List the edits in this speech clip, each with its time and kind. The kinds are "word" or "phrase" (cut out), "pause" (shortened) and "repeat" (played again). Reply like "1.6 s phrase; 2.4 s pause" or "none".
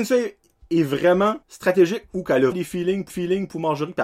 1.4 s pause; 2.5 s word; 3.1 s repeat